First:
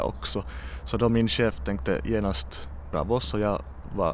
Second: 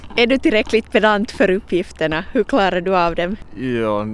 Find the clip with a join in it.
first; 1 cut; at 2.9 s

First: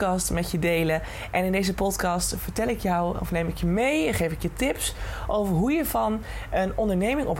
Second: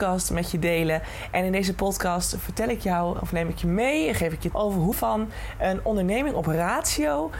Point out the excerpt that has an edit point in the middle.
second; 2 cuts; at 4.5 s, 4.9 s

